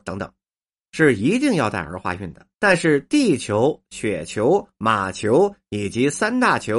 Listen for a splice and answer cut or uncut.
cut